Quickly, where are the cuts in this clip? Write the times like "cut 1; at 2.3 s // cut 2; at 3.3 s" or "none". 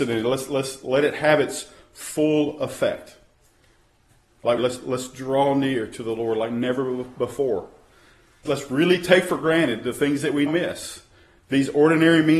cut 1; at 4.6 s // cut 2; at 8.4 s // cut 3; at 10.5 s